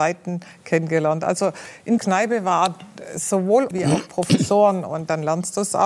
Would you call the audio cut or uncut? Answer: cut